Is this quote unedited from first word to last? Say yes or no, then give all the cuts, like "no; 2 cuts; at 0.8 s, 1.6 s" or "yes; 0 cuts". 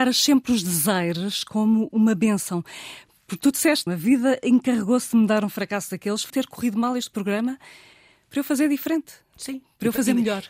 no; 2 cuts; at 3.9 s, 6.3 s